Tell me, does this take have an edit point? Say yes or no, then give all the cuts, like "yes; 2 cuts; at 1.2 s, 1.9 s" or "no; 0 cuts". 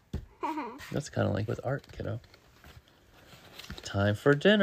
yes; 1 cut; at 1.5 s